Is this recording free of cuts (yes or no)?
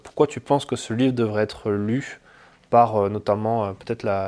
yes